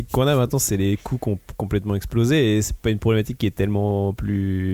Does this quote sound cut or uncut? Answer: uncut